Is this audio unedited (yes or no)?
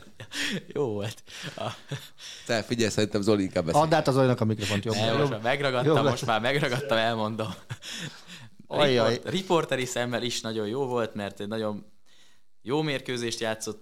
yes